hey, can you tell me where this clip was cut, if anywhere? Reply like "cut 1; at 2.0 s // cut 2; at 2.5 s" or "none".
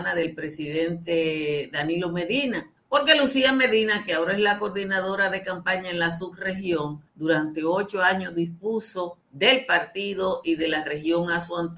cut 1; at 2.8 s // cut 2; at 7.1 s // cut 3; at 9.2 s